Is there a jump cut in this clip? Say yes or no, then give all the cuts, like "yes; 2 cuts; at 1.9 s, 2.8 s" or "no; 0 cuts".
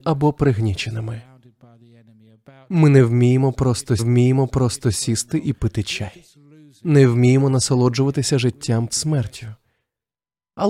yes; 2 cuts; at 4.0 s, 8.9 s